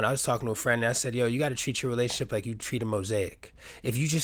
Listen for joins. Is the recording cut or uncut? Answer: uncut